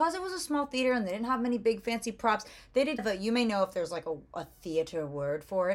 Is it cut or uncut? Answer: cut